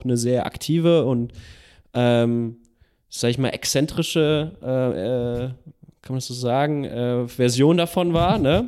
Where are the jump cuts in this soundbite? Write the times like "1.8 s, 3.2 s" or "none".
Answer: none